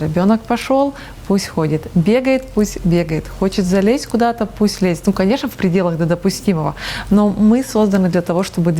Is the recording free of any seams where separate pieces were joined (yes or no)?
yes